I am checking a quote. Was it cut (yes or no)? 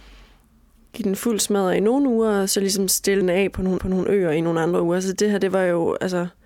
yes